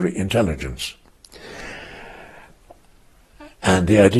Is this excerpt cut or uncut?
uncut